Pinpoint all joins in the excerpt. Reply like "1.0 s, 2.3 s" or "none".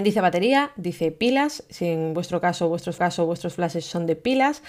3.0 s